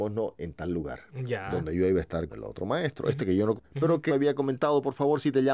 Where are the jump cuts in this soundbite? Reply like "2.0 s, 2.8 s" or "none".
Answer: 2.3 s, 3.2 s, 3.6 s, 4.1 s